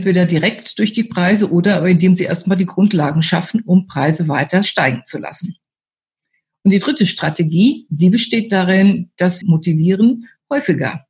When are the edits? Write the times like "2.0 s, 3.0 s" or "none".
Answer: 9.4 s